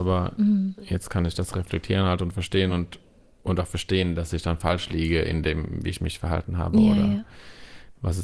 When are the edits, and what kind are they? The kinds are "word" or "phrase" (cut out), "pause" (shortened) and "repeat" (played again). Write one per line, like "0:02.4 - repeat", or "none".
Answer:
none